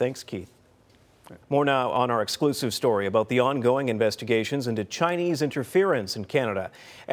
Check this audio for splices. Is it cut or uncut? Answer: cut